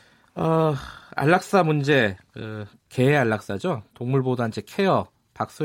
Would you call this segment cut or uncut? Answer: uncut